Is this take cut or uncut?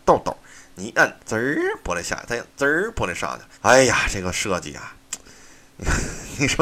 cut